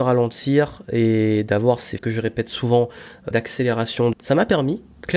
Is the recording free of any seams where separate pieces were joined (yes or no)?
no